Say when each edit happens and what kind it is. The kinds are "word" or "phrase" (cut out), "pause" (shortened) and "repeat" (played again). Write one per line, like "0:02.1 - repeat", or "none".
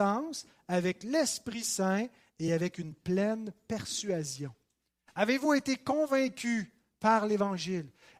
none